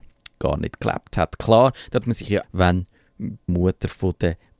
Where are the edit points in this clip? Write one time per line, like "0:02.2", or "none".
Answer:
0:02.0
0:02.4
0:03.5